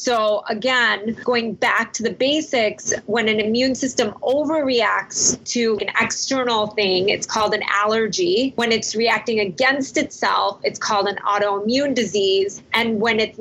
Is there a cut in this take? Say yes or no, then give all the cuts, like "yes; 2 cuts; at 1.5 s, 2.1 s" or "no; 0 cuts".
yes; 1 cut; at 1.2 s